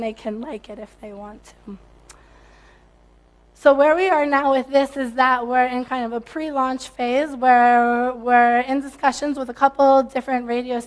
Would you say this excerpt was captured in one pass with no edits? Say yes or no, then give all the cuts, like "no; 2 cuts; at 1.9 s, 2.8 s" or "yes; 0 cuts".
yes; 0 cuts